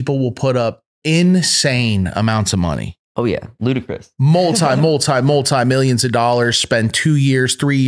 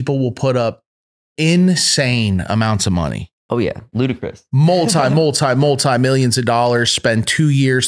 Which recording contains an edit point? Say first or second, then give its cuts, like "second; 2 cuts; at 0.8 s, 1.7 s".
first; 1 cut; at 0.9 s